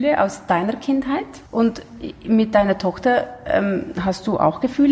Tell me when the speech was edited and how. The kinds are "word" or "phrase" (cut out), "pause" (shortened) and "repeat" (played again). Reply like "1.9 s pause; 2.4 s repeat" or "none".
1.5 s pause